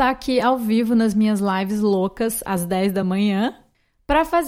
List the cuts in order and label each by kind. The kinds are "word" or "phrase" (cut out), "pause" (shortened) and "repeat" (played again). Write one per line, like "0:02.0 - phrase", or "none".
none